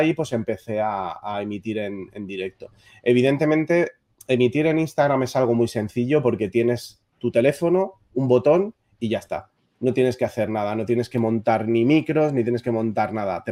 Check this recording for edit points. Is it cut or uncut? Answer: uncut